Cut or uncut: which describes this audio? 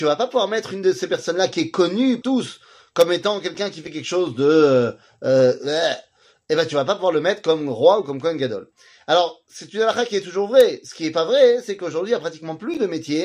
cut